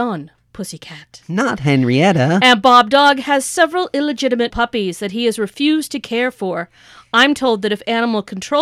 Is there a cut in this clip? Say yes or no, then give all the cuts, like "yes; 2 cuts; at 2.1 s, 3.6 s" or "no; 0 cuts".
yes; 1 cut; at 4.5 s